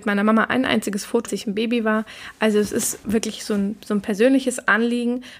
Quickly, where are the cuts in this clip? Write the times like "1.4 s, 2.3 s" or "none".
1.3 s, 3.0 s

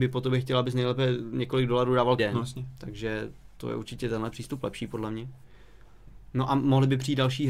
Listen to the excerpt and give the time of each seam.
2.2 s

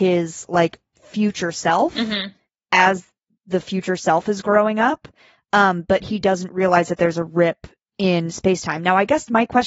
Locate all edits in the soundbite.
none

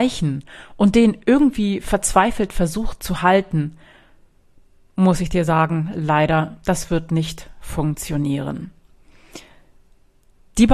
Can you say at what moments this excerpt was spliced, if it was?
none

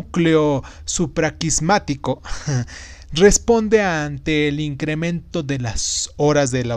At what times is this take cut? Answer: none

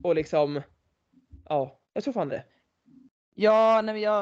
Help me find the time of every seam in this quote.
1.8 s, 2.3 s

